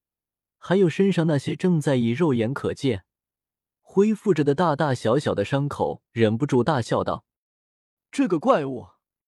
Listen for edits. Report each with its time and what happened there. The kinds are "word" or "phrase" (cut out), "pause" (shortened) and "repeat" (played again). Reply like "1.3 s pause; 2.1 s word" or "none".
6.1 s pause